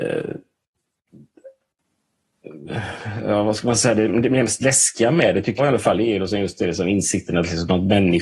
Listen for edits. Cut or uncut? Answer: cut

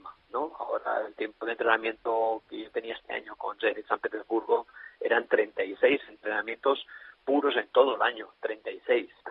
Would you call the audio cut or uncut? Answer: uncut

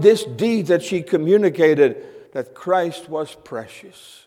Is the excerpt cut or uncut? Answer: cut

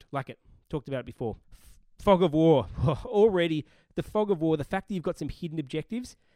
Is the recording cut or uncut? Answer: cut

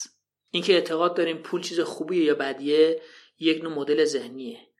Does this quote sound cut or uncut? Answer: uncut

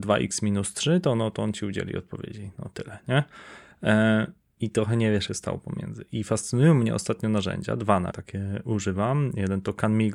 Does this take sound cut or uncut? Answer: cut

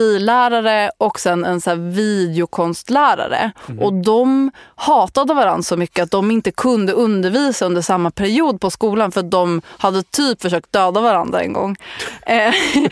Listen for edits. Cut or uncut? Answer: uncut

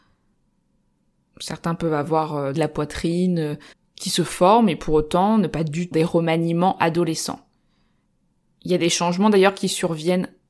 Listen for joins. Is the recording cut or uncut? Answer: cut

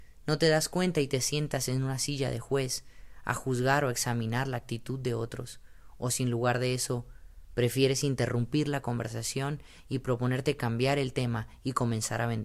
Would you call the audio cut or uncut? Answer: uncut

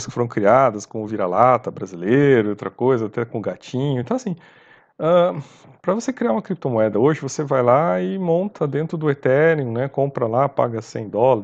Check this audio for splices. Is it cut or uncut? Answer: uncut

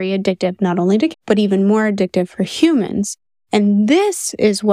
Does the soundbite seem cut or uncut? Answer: cut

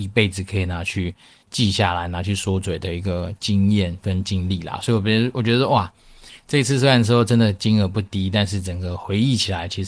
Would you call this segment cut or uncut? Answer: uncut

